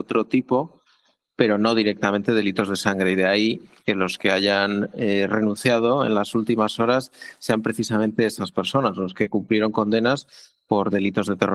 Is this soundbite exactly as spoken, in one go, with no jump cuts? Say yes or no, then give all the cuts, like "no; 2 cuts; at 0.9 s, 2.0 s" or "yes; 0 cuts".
yes; 0 cuts